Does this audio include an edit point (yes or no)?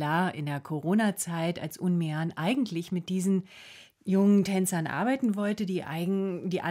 no